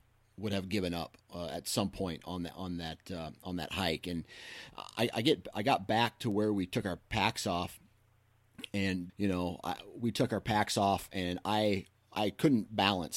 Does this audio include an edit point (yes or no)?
yes